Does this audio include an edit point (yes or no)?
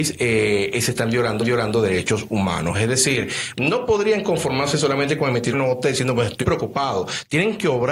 yes